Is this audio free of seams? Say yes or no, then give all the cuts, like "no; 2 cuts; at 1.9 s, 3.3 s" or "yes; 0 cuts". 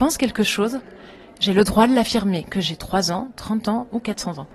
yes; 0 cuts